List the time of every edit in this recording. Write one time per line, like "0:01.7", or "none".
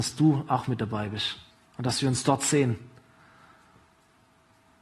0:01.5